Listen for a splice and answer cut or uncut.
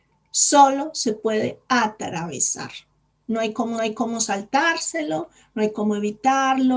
cut